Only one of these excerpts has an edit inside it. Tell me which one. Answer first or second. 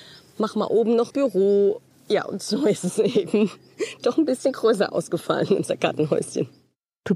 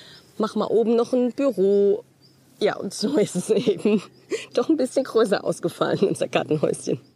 first